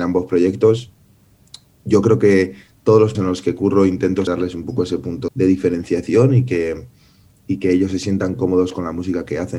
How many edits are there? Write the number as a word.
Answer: three